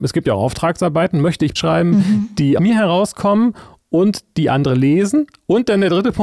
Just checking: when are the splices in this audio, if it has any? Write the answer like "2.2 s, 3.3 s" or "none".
1.6 s, 2.6 s